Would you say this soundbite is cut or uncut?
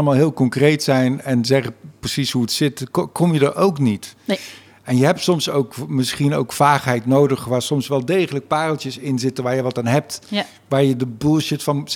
uncut